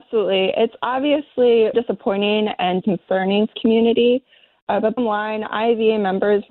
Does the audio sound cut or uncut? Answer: cut